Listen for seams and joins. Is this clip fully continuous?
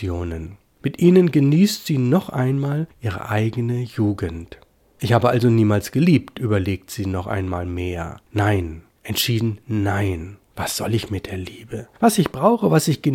yes; 0 cuts

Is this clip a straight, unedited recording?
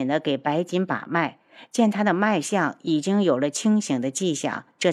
yes; 0 cuts

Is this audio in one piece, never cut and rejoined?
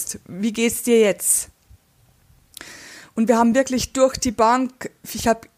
yes; 0 cuts

